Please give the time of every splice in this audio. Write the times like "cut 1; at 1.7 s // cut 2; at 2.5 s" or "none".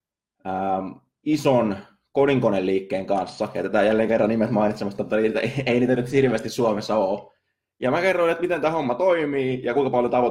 none